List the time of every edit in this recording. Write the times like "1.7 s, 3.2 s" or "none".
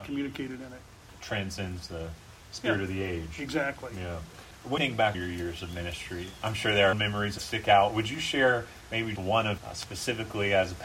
4.8 s, 5.1 s, 6.9 s, 7.4 s, 9.2 s, 9.6 s